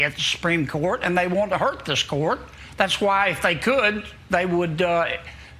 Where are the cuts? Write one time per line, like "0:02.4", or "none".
none